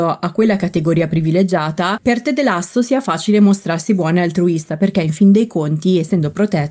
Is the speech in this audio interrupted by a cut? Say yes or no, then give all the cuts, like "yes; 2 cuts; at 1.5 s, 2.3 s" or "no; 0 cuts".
no; 0 cuts